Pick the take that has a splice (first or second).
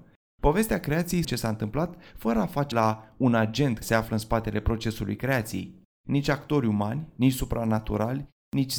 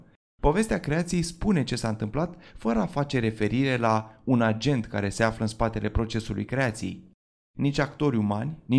first